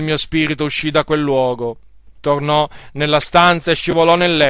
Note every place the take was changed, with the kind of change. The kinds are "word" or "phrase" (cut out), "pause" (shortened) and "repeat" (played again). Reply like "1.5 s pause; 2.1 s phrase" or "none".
2.2 s pause